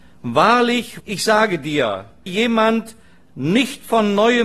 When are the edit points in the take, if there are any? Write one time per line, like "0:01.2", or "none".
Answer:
0:01.0
0:02.3